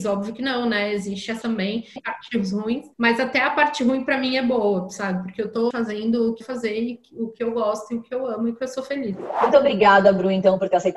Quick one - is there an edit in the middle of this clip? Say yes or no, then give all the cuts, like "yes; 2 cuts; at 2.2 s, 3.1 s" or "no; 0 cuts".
yes; 5 cuts; at 1.4 s, 2.0 s, 2.9 s, 5.7 s, 6.4 s